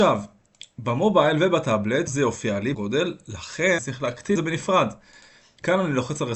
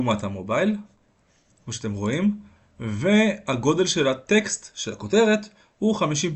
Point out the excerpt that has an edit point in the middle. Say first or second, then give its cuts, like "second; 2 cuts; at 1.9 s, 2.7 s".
first; 4 cuts; at 2.1 s, 2.7 s, 3.8 s, 4.4 s